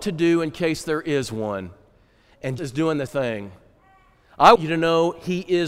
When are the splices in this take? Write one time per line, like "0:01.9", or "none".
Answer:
0:02.6
0:03.1
0:04.6